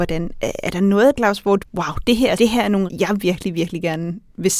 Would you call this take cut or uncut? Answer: cut